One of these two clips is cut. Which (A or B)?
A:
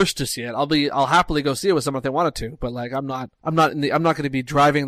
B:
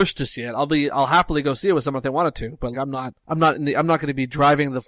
B